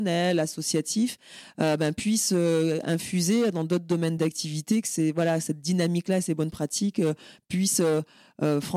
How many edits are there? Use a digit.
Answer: 0